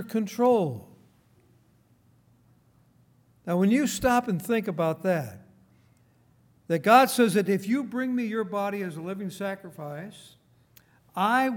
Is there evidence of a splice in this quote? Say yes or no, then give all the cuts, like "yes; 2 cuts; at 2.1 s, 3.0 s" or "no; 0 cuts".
no; 0 cuts